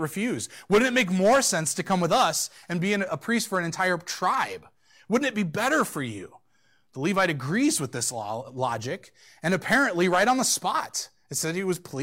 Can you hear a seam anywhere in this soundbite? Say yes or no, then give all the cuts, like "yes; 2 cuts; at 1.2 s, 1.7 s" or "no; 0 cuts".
no; 0 cuts